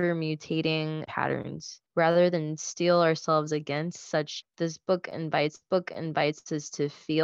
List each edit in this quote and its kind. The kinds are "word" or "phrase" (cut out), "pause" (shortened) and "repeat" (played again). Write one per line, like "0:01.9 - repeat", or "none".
0:01.1 - word
0:01.9 - pause
0:04.4 - word
0:05.6 - repeat